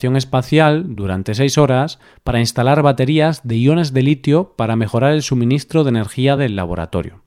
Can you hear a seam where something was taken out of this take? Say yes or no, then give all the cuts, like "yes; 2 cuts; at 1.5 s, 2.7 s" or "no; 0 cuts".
no; 0 cuts